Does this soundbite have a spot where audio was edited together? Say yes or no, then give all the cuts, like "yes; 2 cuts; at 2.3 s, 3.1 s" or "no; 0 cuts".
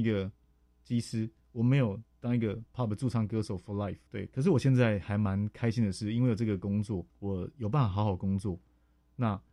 yes; 2 cuts; at 4.1 s, 7.1 s